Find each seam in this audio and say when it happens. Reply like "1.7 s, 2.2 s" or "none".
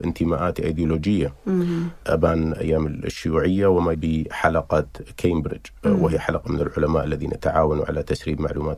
3.9 s